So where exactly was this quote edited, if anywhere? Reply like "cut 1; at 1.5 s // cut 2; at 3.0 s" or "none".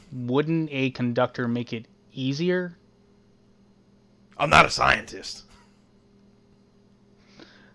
none